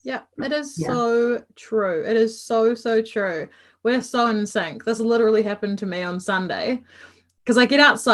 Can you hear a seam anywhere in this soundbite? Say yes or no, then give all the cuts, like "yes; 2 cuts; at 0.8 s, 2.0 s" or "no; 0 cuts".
no; 0 cuts